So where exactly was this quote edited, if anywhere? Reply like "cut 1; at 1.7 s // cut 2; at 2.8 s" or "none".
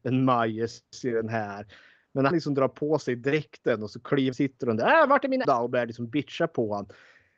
cut 1; at 2.3 s // cut 2; at 4.3 s // cut 3; at 5.4 s